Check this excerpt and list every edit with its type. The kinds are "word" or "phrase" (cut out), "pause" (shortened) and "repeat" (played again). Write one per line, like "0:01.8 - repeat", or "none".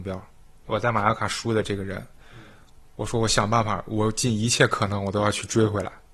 none